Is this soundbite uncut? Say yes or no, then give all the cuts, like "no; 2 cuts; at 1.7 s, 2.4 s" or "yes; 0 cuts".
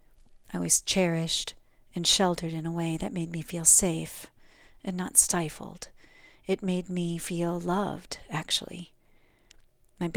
yes; 0 cuts